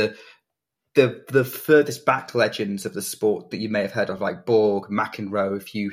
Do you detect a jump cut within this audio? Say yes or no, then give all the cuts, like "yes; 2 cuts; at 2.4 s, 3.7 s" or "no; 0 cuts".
no; 0 cuts